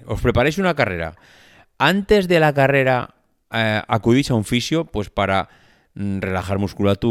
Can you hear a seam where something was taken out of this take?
no; 0 cuts

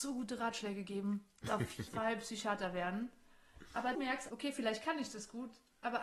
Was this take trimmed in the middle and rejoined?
yes; 4 cuts; at 1.5 s, 1.9 s, 3.9 s, 4.3 s

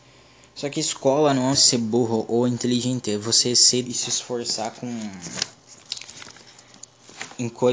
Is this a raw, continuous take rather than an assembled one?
no; 2 cuts; at 1.5 s, 3.9 s

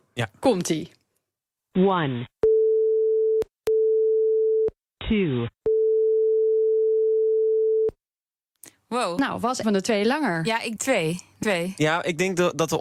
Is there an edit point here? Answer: yes; 4 cuts; at 4.9 s, 9.6 s, 10.8 s, 11.4 s

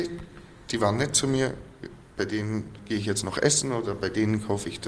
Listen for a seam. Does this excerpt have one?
no; 0 cuts

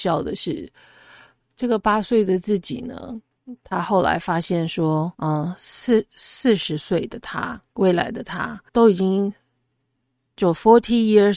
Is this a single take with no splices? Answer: no; 3 cuts; at 5.1 s, 7.7 s, 8.7 s

